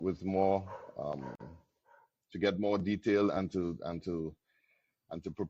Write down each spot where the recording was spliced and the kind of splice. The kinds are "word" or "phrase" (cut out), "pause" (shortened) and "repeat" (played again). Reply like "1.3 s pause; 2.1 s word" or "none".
none